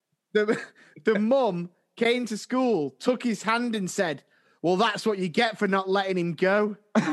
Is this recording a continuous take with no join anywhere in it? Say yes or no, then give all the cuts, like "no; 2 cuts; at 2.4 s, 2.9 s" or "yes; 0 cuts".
yes; 0 cuts